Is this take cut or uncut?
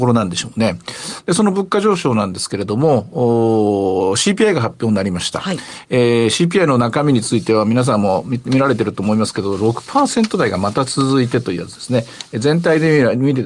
uncut